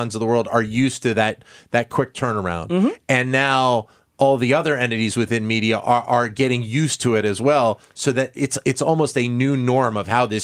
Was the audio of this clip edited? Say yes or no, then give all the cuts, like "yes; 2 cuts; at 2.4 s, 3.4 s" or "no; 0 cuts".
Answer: no; 0 cuts